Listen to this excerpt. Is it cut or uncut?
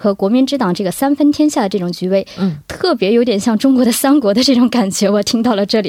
uncut